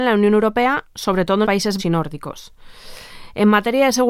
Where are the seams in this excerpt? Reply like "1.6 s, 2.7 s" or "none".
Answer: 1.4 s, 1.8 s